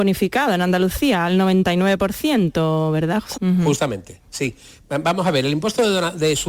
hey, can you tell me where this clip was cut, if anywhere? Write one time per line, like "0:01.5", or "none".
0:03.3